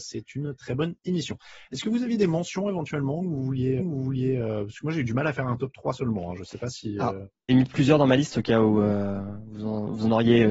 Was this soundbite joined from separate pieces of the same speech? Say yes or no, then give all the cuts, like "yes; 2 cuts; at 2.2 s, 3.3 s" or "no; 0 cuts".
yes; 2 cuts; at 3.8 s, 7.5 s